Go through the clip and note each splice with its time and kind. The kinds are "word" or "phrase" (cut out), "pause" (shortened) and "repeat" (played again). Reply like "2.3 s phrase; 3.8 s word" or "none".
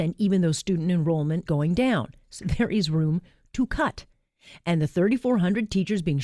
1.5 s word; 2.4 s word